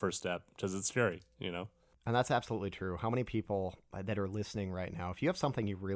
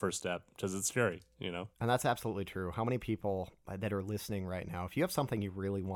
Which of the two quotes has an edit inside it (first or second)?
second